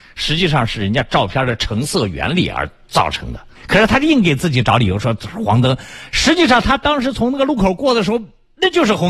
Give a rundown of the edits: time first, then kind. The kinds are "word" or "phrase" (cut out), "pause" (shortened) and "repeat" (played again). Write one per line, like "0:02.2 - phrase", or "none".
0:03.5 - pause